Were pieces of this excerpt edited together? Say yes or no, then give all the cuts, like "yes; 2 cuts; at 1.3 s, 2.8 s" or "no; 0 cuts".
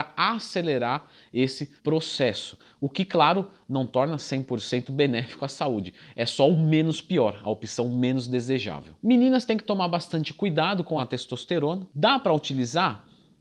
yes; 1 cut; at 1.8 s